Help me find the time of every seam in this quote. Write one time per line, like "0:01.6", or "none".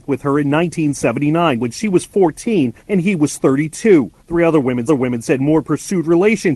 0:02.8
0:04.2
0:04.9